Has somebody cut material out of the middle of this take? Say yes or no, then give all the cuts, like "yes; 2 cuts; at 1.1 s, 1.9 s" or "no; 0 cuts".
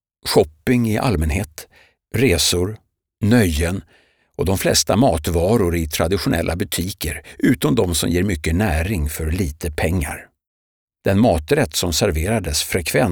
no; 0 cuts